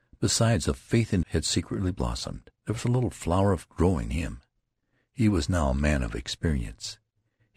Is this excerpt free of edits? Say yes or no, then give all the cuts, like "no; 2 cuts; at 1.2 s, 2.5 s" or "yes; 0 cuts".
no; 4 cuts; at 1.2 s, 2.6 s, 3.7 s, 4.1 s